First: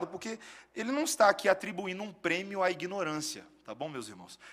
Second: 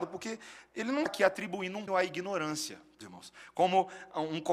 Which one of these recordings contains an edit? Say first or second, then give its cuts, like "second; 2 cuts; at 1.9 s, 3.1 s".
second; 3 cuts; at 1.1 s, 1.9 s, 3.0 s